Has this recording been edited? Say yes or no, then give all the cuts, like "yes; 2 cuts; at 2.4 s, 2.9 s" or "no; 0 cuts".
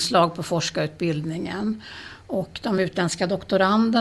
no; 0 cuts